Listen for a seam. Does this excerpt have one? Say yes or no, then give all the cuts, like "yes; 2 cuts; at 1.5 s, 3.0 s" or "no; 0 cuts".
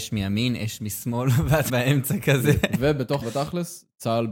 yes; 2 cuts; at 1.7 s, 3.2 s